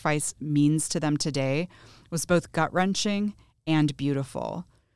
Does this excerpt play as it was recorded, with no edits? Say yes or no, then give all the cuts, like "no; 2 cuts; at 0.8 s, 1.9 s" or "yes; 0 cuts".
yes; 0 cuts